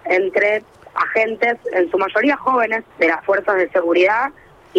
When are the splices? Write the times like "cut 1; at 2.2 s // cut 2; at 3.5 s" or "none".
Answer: cut 1; at 2.9 s